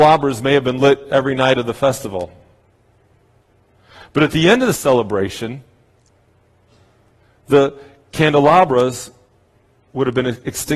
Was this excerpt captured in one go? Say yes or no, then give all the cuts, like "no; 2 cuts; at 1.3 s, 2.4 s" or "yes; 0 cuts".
yes; 0 cuts